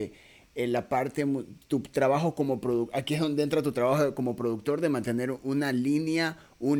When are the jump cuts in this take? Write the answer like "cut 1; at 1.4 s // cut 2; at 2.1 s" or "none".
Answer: none